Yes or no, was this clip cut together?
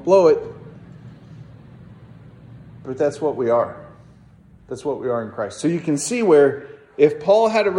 no